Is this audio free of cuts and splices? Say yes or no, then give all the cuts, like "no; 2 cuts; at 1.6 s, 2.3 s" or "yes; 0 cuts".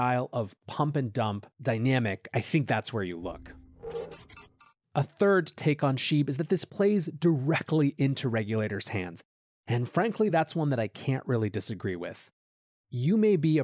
yes; 0 cuts